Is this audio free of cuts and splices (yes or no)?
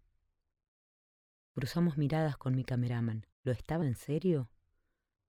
no